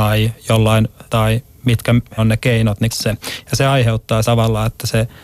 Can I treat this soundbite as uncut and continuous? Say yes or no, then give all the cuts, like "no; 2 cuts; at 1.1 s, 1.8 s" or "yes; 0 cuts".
no; 4 cuts; at 1.1 s, 2.2 s, 2.9 s, 4.2 s